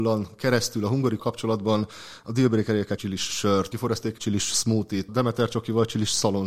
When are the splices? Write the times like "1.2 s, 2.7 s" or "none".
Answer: 1.2 s, 3.0 s, 3.7 s, 4.2 s, 5.1 s